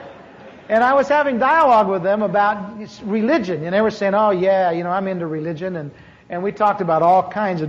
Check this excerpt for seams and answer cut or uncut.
uncut